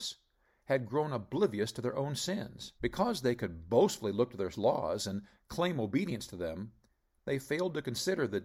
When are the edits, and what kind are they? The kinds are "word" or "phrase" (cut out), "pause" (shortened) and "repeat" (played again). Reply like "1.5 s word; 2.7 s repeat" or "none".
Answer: 2.8 s pause